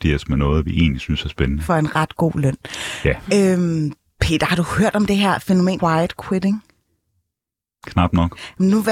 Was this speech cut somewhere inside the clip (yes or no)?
yes